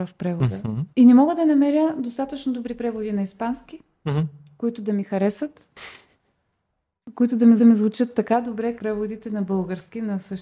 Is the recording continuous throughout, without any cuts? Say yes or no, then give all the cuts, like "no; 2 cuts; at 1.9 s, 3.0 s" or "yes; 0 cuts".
no; 3 cuts; at 0.9 s, 7.6 s, 8.8 s